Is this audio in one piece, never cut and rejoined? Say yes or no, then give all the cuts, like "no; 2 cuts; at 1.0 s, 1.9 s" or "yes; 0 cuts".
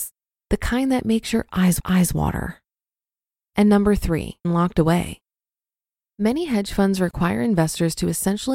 no; 2 cuts; at 1.8 s, 4.4 s